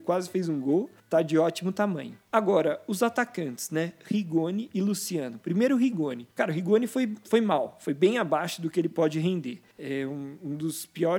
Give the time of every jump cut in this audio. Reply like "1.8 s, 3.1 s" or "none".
1.0 s, 2.3 s, 6.3 s, 9.7 s